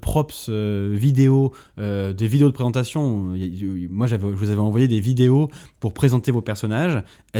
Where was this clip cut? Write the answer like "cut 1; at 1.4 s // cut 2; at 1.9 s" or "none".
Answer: none